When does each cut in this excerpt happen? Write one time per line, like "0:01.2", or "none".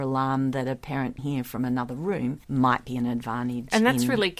0:01.2
0:02.4